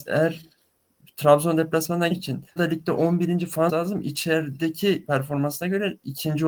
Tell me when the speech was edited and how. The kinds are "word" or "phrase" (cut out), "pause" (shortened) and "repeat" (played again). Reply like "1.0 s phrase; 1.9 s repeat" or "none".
2.1 s word; 2.6 s phrase; 3.7 s word; 5.1 s word